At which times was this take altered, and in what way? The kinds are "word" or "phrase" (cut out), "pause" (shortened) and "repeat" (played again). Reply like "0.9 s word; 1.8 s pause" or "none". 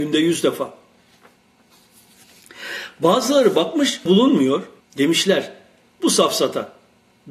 4.1 s word; 4.8 s pause